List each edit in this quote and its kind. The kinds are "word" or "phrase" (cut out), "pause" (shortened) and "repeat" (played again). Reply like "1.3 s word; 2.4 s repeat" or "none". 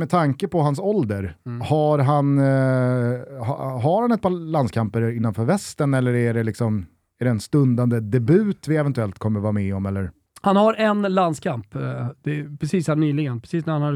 none